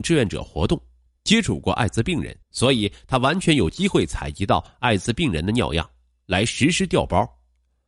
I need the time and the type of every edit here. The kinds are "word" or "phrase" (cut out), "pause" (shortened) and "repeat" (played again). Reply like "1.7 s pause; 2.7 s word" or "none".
2.4 s pause